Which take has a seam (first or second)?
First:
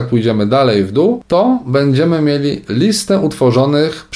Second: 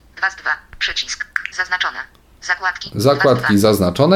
second